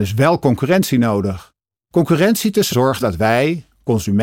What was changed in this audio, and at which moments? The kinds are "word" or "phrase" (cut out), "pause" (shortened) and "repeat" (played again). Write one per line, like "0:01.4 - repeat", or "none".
0:01.7 - pause
0:02.7 - word
0:03.0 - word